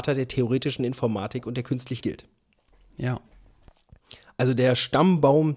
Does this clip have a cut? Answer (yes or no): yes